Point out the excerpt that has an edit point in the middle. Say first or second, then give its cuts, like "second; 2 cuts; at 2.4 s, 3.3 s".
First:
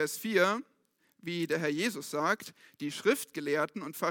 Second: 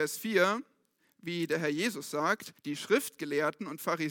second; 1 cut; at 2.6 s